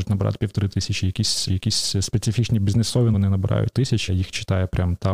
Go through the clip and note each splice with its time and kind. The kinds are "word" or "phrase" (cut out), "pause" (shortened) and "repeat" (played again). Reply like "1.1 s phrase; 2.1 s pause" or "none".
1.5 s repeat; 3.1 s word; 3.7 s phrase; 4.1 s word